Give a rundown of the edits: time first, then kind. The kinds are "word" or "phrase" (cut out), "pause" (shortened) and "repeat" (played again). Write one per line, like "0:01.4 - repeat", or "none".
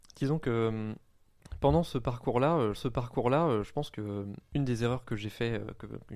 0:02.7 - repeat
0:04.5 - pause